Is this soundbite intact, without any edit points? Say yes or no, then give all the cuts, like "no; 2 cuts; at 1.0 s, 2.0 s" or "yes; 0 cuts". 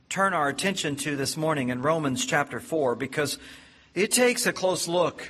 yes; 0 cuts